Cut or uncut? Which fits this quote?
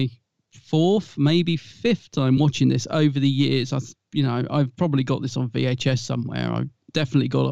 uncut